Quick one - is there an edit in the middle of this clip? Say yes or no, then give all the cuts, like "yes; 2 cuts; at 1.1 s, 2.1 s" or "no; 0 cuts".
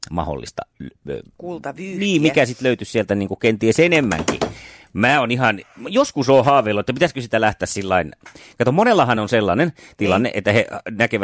no; 0 cuts